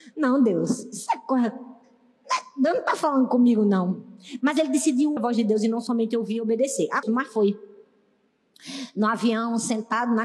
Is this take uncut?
no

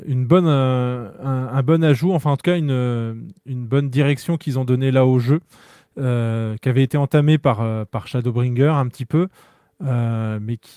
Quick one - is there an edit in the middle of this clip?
no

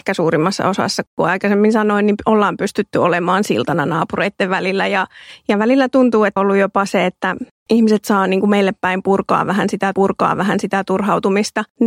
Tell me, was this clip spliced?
yes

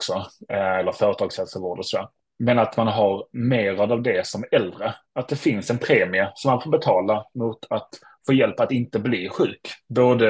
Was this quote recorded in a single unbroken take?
yes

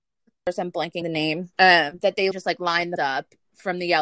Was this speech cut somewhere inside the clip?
yes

